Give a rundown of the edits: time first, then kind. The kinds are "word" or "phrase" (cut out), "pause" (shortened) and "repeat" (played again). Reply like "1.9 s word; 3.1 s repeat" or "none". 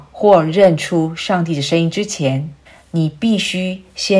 2.7 s pause